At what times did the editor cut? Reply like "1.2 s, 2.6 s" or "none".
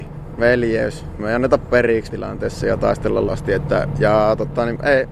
2.1 s, 3.3 s

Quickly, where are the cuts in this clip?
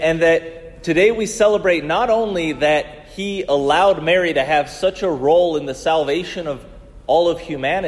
none

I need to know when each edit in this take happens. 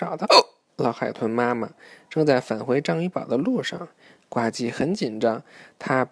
none

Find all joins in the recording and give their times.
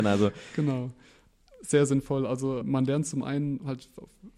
2.6 s

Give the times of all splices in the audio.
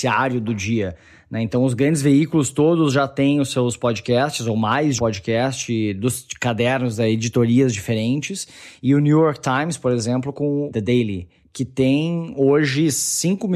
5.0 s, 10.3 s

